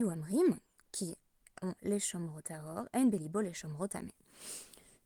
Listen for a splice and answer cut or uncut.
cut